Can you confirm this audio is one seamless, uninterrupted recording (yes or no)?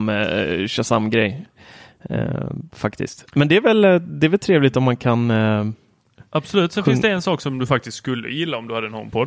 yes